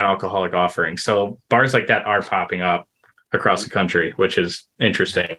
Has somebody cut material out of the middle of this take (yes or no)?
no